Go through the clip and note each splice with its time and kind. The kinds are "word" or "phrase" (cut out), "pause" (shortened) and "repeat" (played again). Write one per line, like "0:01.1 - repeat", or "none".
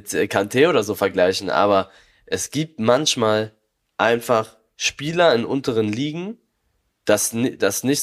none